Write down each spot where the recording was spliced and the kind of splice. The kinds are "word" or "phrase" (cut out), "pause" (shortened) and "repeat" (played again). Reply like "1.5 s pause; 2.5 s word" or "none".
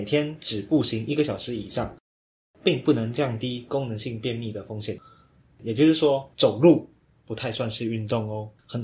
none